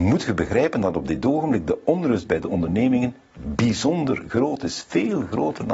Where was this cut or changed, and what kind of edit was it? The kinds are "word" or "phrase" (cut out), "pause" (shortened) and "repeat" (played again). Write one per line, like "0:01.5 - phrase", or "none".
none